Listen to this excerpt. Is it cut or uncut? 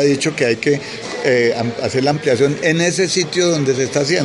uncut